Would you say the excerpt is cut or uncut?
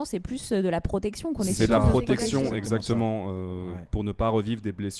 uncut